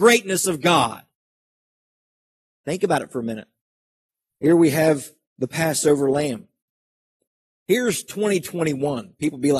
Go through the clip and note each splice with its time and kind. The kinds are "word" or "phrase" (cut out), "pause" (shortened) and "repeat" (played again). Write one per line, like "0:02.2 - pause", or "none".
0:04.1 - pause